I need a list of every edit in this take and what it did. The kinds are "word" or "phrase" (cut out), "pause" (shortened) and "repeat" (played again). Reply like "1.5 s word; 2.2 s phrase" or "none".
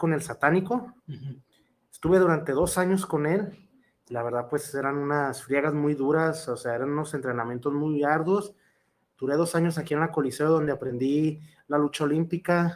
1.0 s pause